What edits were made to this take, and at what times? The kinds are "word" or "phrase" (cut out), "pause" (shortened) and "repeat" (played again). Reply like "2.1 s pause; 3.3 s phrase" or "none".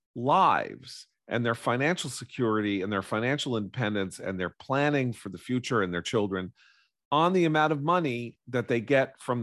none